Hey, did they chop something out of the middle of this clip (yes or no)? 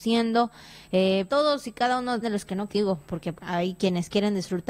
yes